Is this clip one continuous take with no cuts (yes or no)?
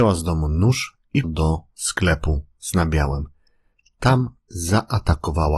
no